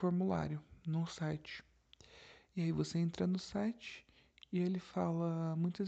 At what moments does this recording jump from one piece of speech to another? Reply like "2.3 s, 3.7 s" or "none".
none